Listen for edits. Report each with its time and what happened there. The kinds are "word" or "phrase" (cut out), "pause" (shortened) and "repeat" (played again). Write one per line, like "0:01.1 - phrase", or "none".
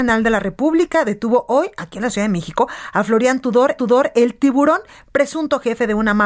0:03.8 - repeat